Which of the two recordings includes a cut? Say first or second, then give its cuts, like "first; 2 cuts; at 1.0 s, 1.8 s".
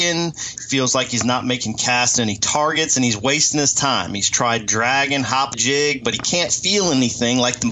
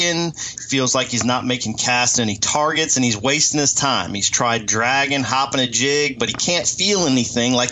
first; 1 cut; at 5.5 s